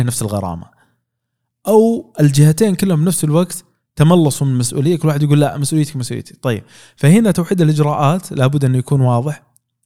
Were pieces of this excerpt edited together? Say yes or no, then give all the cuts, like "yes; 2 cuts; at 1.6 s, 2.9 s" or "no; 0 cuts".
no; 0 cuts